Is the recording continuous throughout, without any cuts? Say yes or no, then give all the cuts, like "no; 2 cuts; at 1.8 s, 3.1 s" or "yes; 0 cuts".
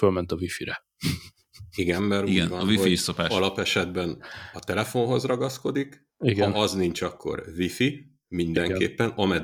yes; 0 cuts